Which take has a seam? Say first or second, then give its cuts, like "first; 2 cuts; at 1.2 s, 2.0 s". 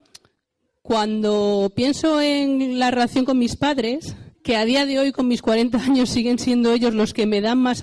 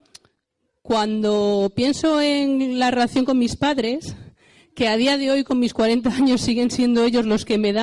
first; 1 cut; at 4.3 s